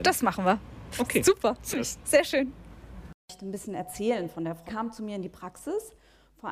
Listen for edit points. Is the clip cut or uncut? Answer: cut